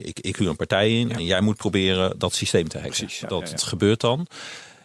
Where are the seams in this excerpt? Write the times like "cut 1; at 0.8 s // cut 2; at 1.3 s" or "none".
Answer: cut 1; at 3.2 s // cut 2; at 3.6 s